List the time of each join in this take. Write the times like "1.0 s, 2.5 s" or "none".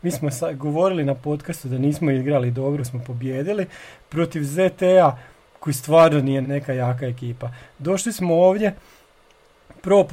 2.8 s, 6.4 s